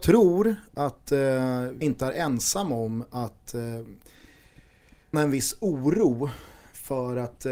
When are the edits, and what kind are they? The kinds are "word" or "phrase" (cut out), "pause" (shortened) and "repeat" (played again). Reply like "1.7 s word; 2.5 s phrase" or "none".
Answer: 1.8 s word; 5.1 s word